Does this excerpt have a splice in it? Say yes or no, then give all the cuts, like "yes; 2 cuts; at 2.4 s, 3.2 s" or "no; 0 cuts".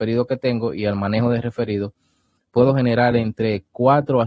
no; 0 cuts